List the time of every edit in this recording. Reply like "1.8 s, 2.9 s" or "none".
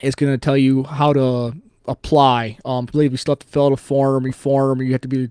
2.9 s, 4.3 s